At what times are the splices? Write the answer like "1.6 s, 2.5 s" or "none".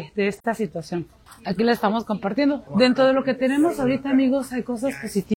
1.3 s, 2.7 s